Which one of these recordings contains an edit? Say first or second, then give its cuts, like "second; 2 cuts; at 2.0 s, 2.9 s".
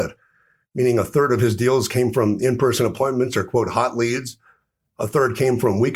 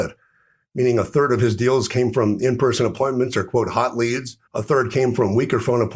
second; 1 cut; at 4.4 s